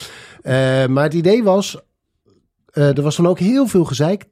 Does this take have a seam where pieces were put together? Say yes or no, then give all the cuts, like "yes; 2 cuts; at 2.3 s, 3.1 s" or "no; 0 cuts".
no; 0 cuts